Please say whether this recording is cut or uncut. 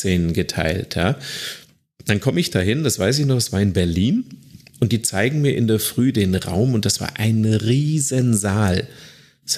uncut